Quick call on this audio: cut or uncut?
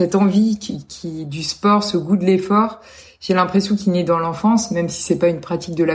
uncut